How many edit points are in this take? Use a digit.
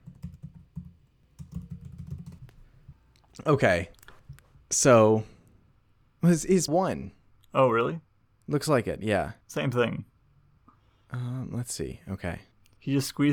1